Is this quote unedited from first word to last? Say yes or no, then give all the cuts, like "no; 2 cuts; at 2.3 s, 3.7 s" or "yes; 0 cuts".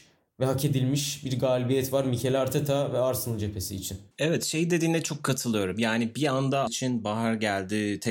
no; 2 cuts; at 4.1 s, 6.7 s